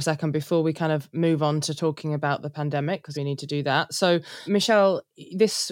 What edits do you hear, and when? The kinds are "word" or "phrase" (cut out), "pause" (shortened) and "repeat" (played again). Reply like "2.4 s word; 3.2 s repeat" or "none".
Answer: 3.1 s phrase

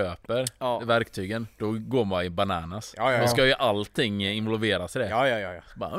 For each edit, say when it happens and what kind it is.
1.5 s pause

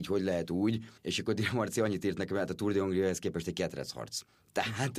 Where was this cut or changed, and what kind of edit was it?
1.0 s pause

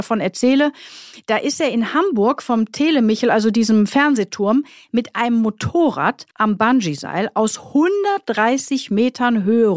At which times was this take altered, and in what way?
6.3 s pause

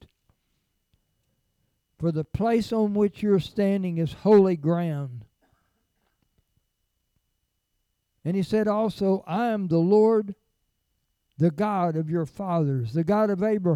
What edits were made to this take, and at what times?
none

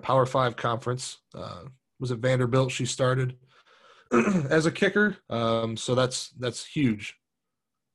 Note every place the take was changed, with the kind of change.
5.2 s pause

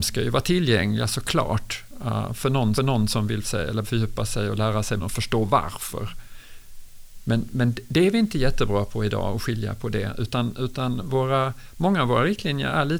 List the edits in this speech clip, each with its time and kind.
2.7 s repeat; 3.4 s word; 3.8 s word; 5.0 s word

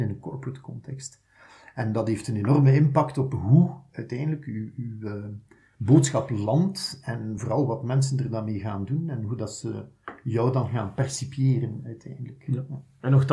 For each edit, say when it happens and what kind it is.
none

